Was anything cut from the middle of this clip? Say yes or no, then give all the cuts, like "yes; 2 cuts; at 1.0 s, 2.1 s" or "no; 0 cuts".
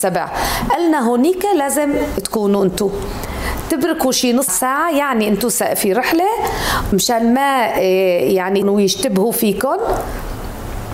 yes; 2 cuts; at 4.5 s, 8.6 s